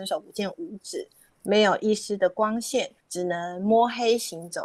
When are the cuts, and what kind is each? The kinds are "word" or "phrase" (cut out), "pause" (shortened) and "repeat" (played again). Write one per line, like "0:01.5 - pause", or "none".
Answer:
0:03.0 - pause